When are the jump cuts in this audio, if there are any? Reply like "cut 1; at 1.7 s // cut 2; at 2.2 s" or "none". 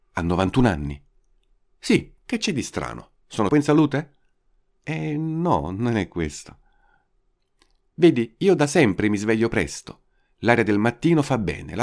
cut 1; at 3.5 s

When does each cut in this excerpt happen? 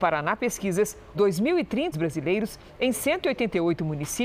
cut 1; at 1.1 s // cut 2; at 1.9 s

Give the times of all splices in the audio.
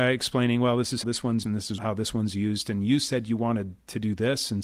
cut 1; at 1.0 s // cut 2; at 1.4 s // cut 3; at 1.8 s

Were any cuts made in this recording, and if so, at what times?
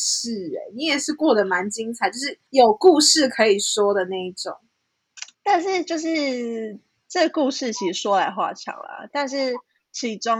cut 1; at 2.5 s // cut 2; at 5.3 s

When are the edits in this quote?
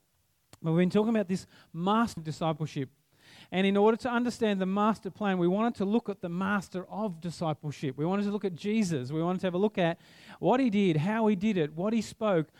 cut 1; at 2.2 s

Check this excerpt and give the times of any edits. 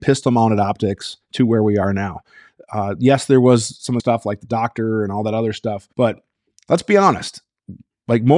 cut 1; at 4.0 s // cut 2; at 5.9 s

